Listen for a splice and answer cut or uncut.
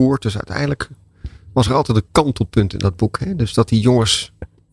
uncut